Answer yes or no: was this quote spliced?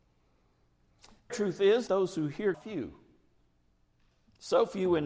yes